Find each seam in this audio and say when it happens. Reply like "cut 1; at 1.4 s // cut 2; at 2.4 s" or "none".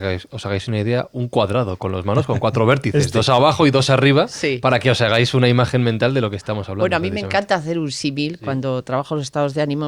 none